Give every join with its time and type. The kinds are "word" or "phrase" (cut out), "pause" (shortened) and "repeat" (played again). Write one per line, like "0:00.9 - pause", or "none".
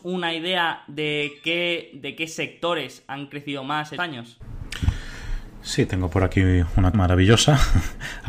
0:04.0 - phrase
0:06.9 - word